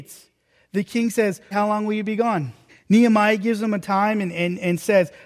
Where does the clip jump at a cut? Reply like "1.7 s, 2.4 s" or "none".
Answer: 1.5 s, 2.7 s

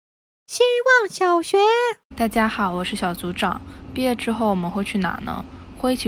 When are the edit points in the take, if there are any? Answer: 2.0 s

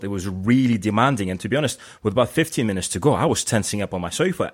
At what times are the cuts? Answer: none

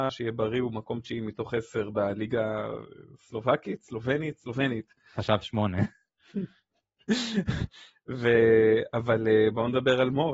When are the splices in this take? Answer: 5.4 s

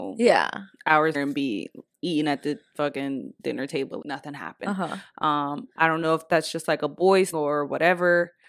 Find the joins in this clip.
1.1 s, 1.9 s, 4.0 s, 7.3 s

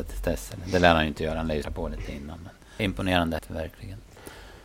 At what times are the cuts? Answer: 1.6 s, 2.8 s, 3.4 s

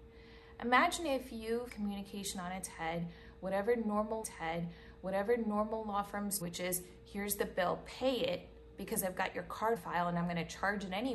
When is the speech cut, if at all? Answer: 1.7 s, 4.2 s, 6.4 s, 9.8 s

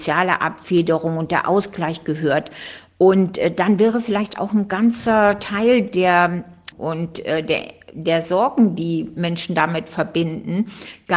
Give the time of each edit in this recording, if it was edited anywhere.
6.7 s

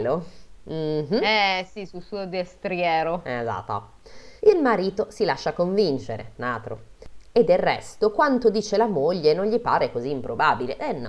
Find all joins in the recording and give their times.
4.4 s

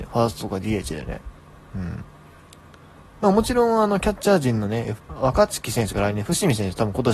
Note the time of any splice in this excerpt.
5.0 s

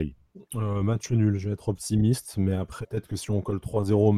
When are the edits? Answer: 2.8 s

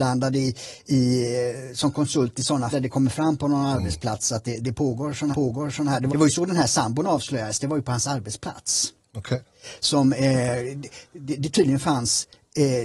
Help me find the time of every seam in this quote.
2.7 s, 5.3 s, 6.1 s

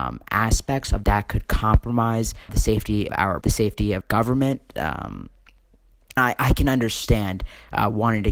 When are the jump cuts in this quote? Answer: 1.0 s, 2.5 s, 3.1 s, 3.4 s, 4.0 s, 6.2 s

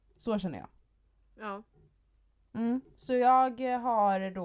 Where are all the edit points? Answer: none

